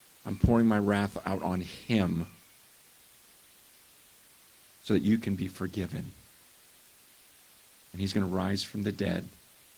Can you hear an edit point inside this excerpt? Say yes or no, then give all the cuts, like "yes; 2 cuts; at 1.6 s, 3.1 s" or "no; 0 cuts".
no; 0 cuts